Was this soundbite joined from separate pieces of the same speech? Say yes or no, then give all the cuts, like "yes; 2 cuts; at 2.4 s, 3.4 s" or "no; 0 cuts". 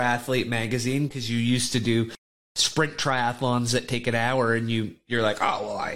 no; 0 cuts